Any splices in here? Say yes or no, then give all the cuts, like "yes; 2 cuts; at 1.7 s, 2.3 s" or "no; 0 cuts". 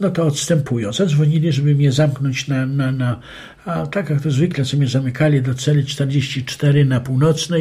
no; 0 cuts